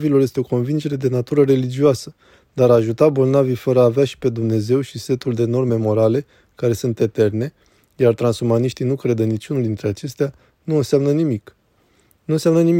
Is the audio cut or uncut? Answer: uncut